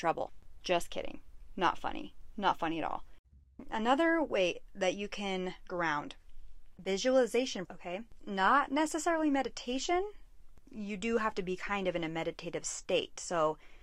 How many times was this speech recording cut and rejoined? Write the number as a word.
two